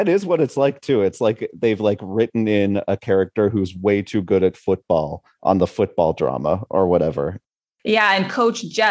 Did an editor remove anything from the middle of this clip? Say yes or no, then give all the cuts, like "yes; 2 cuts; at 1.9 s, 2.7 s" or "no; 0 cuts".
no; 0 cuts